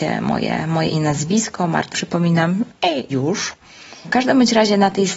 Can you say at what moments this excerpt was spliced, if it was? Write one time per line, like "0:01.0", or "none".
0:00.9
0:01.9
0:03.1